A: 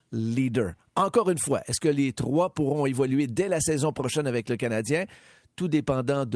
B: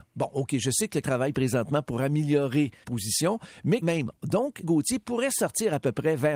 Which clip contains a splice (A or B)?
B